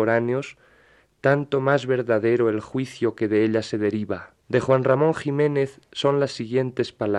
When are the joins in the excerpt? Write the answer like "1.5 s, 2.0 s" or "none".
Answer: 4.4 s